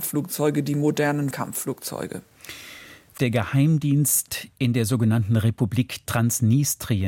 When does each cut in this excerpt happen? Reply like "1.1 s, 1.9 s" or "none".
1.3 s, 3.2 s